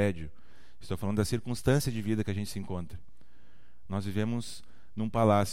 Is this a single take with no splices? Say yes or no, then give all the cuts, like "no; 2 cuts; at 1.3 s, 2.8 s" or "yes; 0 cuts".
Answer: yes; 0 cuts